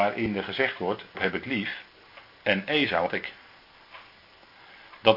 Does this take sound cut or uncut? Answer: cut